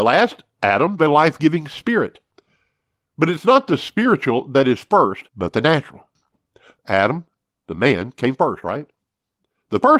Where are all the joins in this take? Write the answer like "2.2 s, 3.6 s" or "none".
1.0 s